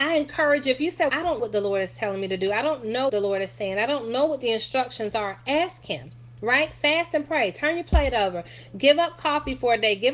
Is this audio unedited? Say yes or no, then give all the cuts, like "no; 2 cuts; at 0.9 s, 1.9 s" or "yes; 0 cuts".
no; 3 cuts; at 1.1 s, 1.4 s, 3.1 s